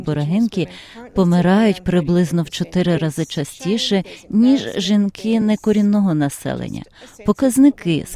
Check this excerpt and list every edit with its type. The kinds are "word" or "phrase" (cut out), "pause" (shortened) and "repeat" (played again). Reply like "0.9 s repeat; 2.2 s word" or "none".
none